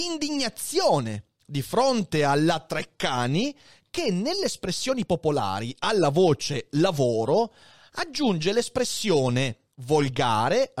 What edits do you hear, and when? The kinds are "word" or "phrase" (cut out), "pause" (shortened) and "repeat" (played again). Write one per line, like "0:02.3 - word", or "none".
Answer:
none